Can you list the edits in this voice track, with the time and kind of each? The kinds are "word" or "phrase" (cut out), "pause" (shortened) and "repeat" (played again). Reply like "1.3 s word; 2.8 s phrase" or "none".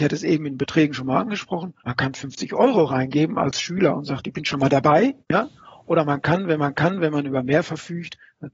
1.8 s pause; 5.2 s pause; 6.6 s repeat